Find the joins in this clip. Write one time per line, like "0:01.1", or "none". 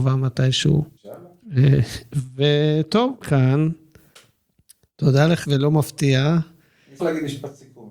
0:03.2
0:05.4
0:07.0